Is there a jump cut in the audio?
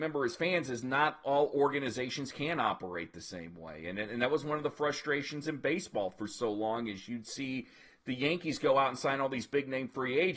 no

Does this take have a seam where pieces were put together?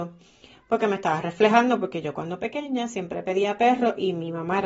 no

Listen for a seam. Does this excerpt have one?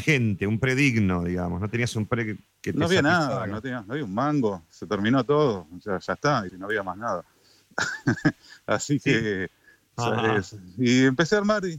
yes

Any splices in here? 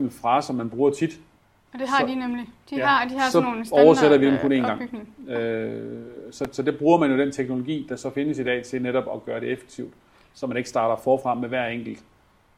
no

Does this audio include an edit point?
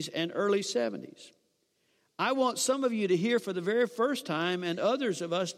no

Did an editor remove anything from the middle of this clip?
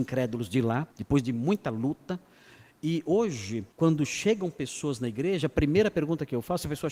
yes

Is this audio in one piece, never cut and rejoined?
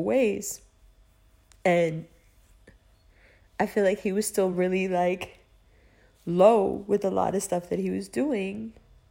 yes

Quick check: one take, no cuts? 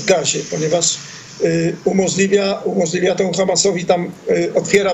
yes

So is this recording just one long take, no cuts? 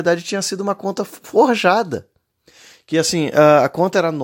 yes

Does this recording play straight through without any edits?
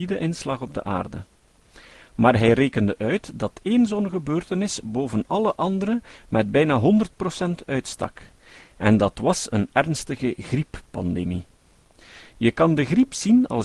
yes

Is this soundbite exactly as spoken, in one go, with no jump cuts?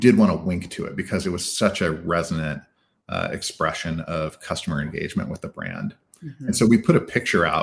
yes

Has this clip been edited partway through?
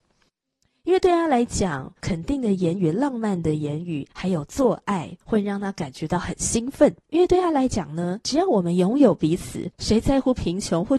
yes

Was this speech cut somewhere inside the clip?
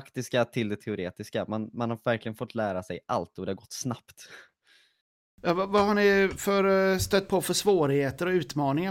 no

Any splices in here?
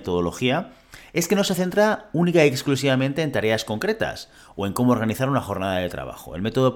no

